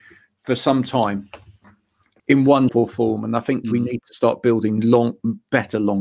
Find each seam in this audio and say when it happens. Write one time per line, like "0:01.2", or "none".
0:02.2
0:02.7
0:03.6